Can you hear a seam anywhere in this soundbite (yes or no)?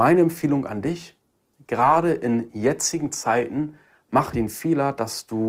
yes